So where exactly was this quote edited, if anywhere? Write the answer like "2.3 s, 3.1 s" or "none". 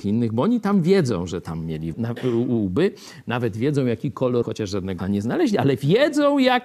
1.9 s, 4.4 s, 5.0 s